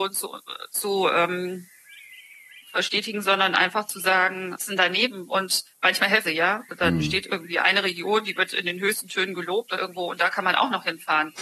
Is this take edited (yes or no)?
yes